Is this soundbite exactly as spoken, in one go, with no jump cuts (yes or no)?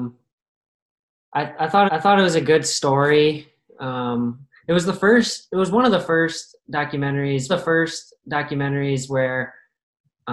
no